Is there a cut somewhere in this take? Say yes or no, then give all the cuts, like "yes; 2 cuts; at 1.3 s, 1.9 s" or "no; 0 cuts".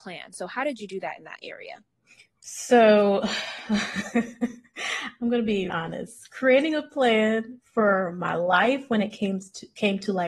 yes; 1 cut; at 5.7 s